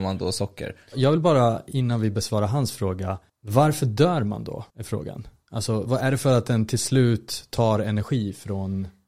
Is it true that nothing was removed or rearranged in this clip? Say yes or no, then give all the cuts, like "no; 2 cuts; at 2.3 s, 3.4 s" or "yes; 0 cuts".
no; 3 cuts; at 3.3 s, 4.7 s, 5.9 s